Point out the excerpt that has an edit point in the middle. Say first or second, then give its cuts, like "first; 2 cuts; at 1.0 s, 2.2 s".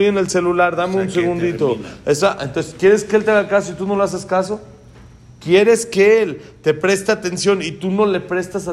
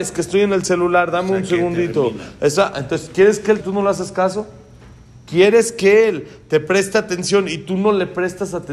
second; 1 cut; at 3.6 s